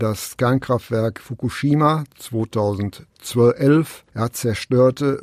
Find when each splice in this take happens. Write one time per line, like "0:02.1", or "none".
0:04.1